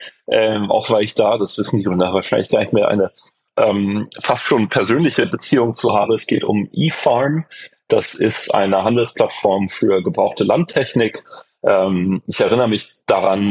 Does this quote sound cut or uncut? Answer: cut